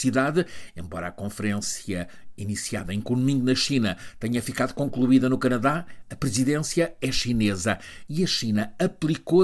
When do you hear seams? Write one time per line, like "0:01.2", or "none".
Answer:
none